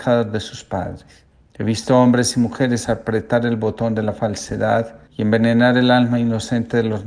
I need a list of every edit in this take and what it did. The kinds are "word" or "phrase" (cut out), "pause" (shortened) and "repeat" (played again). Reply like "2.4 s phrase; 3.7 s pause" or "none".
1.3 s pause; 5.1 s pause